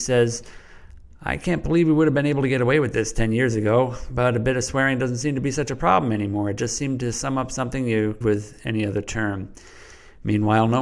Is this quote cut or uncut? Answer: cut